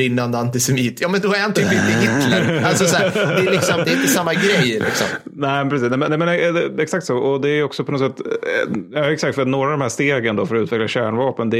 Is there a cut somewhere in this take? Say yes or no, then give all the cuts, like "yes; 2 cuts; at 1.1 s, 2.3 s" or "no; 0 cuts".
no; 0 cuts